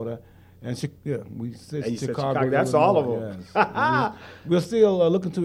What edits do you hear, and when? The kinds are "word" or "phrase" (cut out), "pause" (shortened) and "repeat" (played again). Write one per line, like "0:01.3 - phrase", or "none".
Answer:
0:01.0 - pause